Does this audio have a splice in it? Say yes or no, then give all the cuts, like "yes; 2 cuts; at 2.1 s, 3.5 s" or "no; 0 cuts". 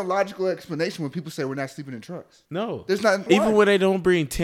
yes; 2 cuts; at 2.5 s, 3.3 s